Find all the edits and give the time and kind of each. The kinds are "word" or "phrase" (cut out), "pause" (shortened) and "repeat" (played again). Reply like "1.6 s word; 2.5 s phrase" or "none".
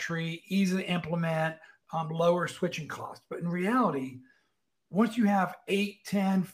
none